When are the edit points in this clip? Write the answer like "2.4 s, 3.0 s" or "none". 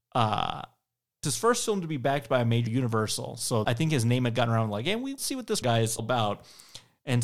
1.2 s, 2.7 s, 3.6 s, 5.2 s, 5.6 s, 6.0 s